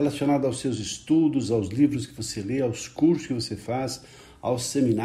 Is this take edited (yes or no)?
no